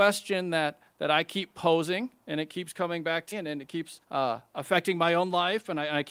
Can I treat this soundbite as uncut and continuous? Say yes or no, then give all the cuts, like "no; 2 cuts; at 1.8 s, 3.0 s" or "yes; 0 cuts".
no; 3 cuts; at 2.2 s, 3.3 s, 4.0 s